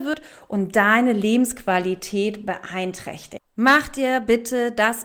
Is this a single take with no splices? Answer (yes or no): no